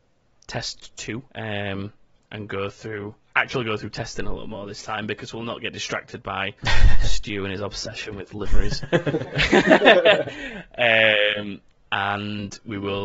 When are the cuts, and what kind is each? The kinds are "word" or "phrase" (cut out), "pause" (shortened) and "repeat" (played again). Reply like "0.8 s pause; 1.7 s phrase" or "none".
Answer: 1.3 s pause; 6.6 s pause; 11.7 s pause